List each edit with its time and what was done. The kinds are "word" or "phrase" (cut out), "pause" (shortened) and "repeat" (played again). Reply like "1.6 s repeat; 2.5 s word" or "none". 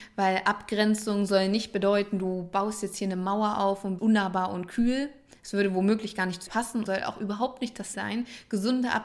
4.0 s word; 6.5 s word; 6.9 s word; 7.9 s word

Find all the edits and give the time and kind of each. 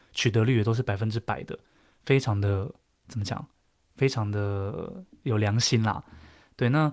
none

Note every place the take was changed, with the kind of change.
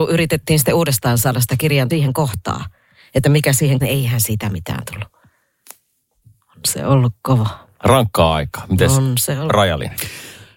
1.9 s word; 3.8 s word

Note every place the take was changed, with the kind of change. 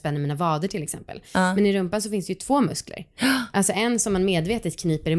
none

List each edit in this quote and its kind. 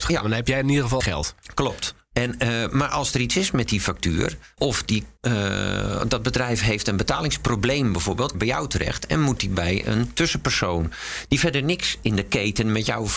1.0 s phrase; 4.6 s word; 5.2 s pause; 8.3 s phrase

